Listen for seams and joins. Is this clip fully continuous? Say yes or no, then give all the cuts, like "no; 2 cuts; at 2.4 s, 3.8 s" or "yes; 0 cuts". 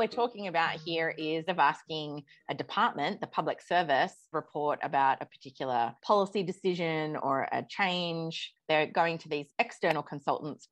no; 3 cuts; at 1.5 s, 4.3 s, 6.0 s